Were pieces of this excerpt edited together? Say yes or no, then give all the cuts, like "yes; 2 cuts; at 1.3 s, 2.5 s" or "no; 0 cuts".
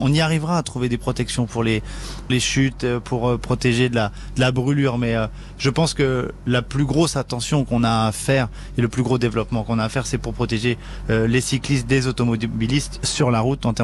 yes; 1 cut; at 2.3 s